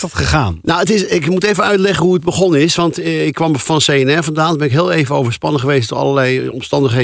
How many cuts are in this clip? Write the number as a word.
zero